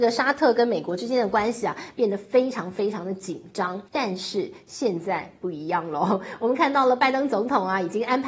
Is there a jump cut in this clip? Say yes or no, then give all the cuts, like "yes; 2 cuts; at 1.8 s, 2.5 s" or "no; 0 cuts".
yes; 1 cut; at 3.9 s